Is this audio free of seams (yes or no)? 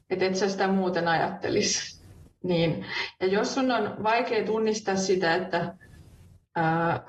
yes